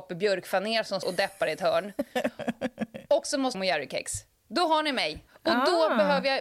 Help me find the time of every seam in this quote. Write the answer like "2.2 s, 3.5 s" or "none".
1.0 s, 3.5 s, 5.3 s